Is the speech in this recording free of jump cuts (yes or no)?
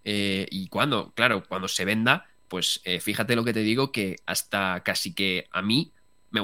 yes